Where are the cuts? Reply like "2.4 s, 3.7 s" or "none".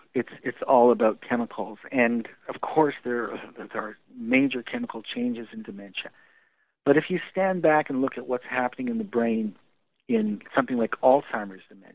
none